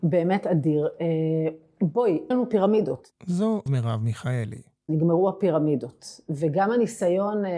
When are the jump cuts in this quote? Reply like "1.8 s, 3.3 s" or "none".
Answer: 2.3 s, 3.7 s